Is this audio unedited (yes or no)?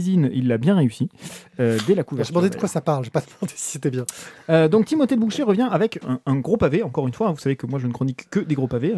no